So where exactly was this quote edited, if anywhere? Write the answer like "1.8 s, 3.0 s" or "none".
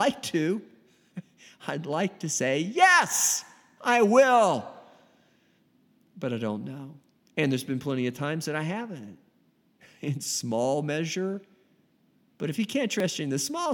none